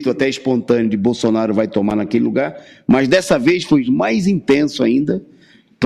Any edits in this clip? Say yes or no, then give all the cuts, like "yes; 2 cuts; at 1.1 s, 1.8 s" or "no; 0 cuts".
no; 0 cuts